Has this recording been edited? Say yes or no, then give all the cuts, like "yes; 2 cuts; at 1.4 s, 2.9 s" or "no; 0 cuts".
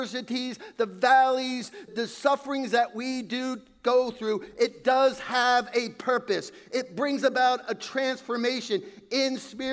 yes; 1 cut; at 1.9 s